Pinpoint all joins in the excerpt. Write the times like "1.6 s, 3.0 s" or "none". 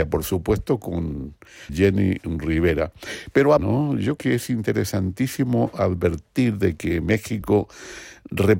1.7 s, 3.6 s, 4.2 s